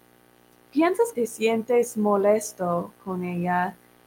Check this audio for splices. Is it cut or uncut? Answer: cut